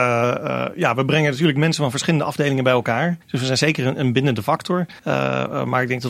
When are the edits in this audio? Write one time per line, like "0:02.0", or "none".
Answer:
0:03.2
0:05.0